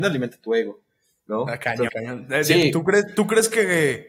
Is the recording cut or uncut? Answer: cut